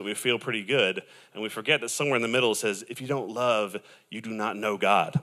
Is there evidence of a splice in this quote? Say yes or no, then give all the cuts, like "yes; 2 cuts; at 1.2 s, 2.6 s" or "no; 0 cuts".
no; 0 cuts